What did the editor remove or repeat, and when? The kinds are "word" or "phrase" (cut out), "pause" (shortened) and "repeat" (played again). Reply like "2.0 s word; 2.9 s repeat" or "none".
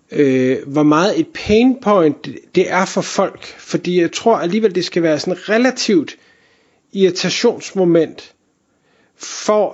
none